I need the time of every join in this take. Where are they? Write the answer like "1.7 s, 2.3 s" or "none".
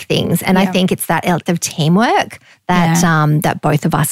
1.5 s, 2.5 s